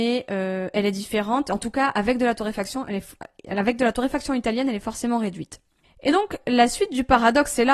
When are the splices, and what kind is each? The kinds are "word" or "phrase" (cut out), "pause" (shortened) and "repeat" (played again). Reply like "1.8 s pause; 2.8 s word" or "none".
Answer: none

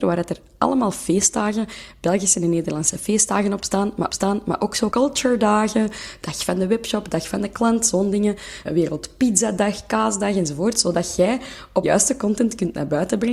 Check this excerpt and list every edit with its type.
4.1 s repeat; 4.9 s word; 8.6 s word; 11.8 s phrase

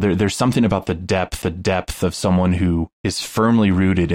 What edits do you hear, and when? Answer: 1.4 s repeat; 2.9 s pause

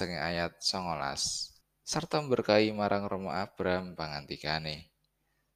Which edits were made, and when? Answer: 1.6 s pause

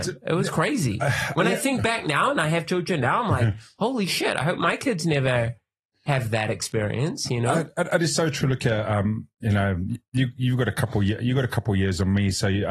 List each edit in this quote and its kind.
none

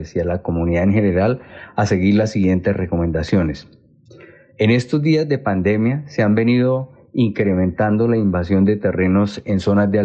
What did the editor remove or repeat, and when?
none

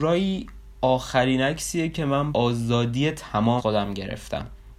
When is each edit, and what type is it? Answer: 2.3 s word; 3.6 s word

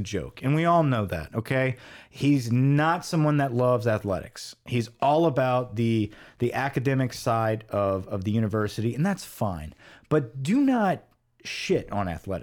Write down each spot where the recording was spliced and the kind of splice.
none

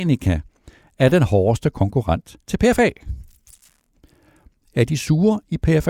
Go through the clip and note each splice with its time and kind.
2.4 s pause

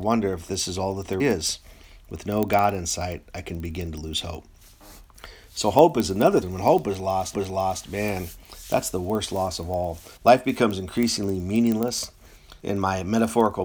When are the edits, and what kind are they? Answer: 1.2 s word; 6.4 s phrase; 7.3 s repeat; 10.2 s pause; 12.6 s pause

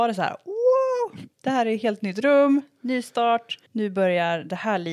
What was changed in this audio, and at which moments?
1.3 s pause; 3.7 s pause

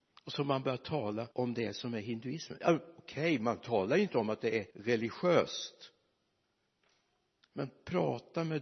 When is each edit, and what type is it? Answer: 1.3 s pause; 4.7 s pause

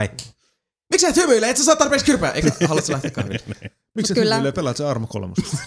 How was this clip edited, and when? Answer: 2.4 s word

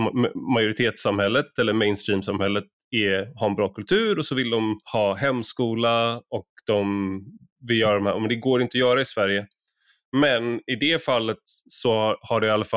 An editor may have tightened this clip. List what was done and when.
4.8 s pause

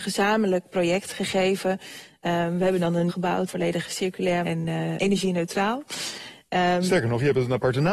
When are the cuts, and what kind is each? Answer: 3.1 s word; 3.5 s word; 4.4 s word; 5.0 s word

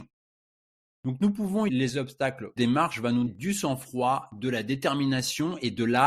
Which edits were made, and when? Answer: 1.7 s word; 2.6 s phrase; 3.3 s word

